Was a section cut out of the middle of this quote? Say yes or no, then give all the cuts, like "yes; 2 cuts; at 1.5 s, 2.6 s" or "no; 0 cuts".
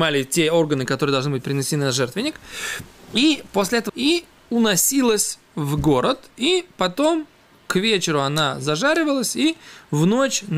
yes; 1 cut; at 3.9 s